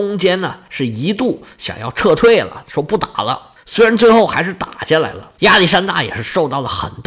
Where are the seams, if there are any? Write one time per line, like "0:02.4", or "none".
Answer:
none